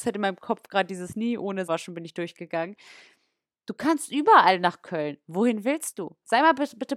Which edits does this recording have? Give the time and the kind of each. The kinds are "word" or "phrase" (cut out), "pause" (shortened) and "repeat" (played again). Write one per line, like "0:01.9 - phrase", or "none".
0:01.7 - word